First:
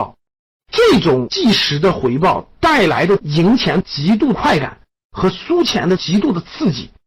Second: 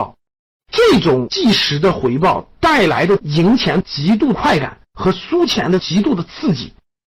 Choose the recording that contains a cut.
second; 1 cut; at 4.8 s

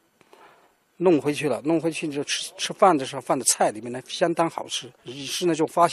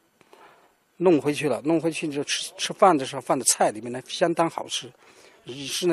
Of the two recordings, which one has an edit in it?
first; 1 cut; at 5.0 s

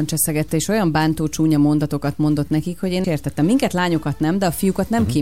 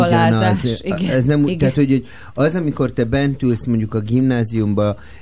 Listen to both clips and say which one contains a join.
first; 1 cut; at 3.0 s

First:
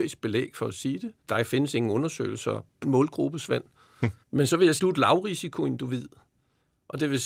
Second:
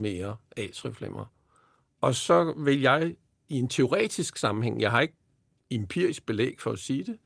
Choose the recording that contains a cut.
first; 4 cuts; at 1.2 s, 2.8 s, 4.2 s, 4.8 s

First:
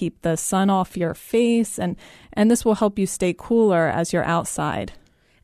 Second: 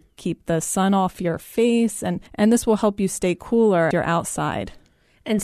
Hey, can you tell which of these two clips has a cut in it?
second; 2 cuts; at 2.3 s, 3.9 s

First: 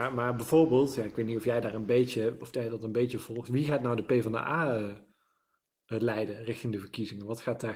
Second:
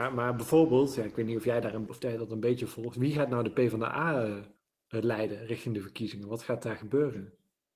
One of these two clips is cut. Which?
second; 2 cuts; at 1.9 s, 4.6 s

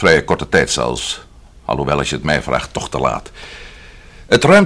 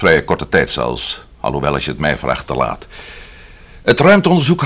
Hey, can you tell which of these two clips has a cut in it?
second; 2 cuts; at 1.3 s, 2.5 s

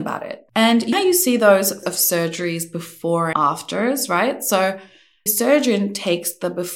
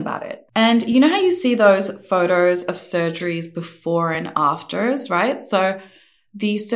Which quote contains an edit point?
first; 4 cuts; at 0.9 s, 1.8 s, 3.3 s, 5.3 s

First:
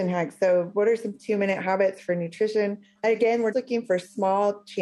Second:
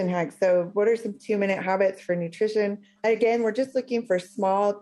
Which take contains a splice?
first; 1 cut; at 3.5 s

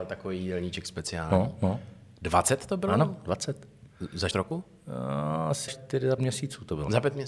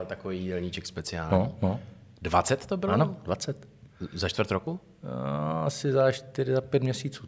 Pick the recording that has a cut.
first; 3 cuts; at 4.3 s, 5.7 s, 6.2 s

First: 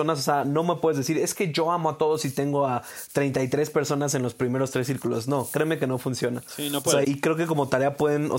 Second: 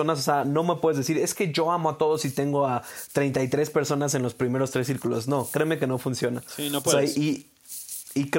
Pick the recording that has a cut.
first; 1 cut; at 7.0 s

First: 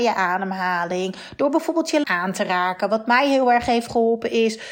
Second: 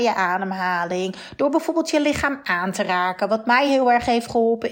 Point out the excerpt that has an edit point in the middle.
first; 1 cut; at 2.0 s

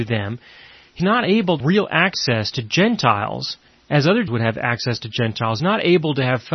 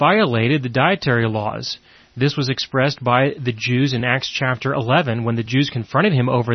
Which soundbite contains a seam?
first; 5 cuts; at 1.0 s, 1.6 s, 3.7 s, 4.3 s, 5.6 s

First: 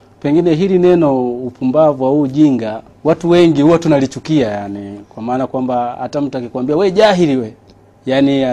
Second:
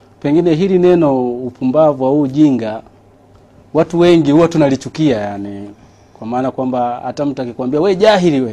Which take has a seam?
first; 2 cuts; at 2.9 s, 5.1 s

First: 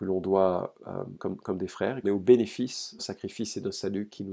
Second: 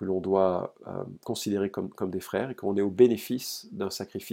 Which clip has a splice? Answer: first; 3 cuts; at 1.2 s, 2.0 s, 3.0 s

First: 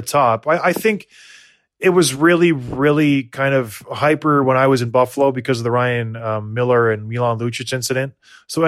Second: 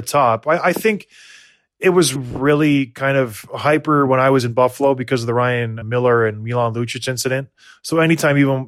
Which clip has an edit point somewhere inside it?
second; 2 cuts; at 2.2 s, 5.8 s

